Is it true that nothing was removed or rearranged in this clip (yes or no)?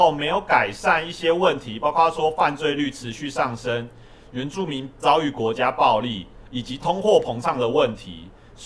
no